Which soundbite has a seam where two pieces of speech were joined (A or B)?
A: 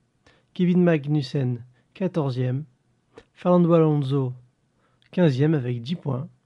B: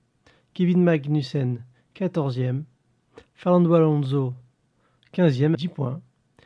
B